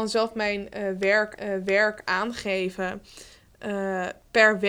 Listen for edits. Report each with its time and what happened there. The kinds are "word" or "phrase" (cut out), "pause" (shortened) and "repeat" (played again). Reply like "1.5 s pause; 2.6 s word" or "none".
1.4 s repeat